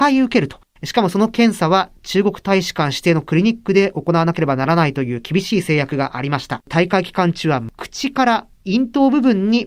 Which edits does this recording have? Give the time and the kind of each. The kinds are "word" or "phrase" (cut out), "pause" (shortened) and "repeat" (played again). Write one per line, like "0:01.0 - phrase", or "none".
0:06.6 - pause

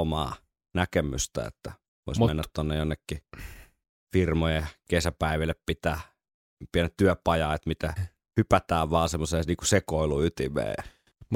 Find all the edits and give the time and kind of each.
none

